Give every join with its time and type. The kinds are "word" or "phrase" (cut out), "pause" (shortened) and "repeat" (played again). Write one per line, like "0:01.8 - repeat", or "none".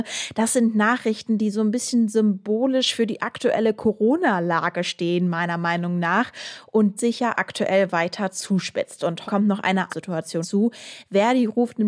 0:07.0 - word
0:09.3 - word
0:09.9 - word
0:10.4 - word